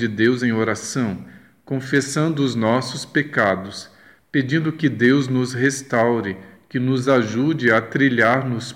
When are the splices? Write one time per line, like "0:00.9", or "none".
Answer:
none